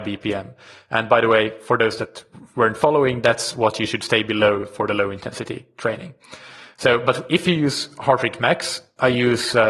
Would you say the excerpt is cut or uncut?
uncut